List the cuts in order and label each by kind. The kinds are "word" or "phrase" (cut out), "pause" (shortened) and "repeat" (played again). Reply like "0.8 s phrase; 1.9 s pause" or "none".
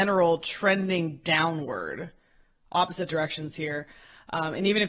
none